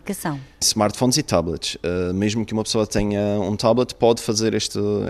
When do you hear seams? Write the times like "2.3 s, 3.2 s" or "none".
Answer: none